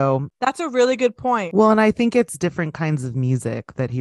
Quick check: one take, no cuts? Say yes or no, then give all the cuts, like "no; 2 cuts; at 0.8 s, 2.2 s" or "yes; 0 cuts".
yes; 0 cuts